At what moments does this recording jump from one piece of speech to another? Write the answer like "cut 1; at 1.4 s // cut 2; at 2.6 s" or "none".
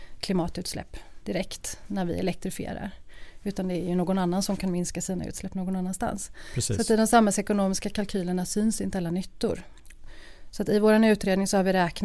none